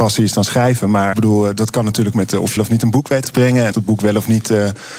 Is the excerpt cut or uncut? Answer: cut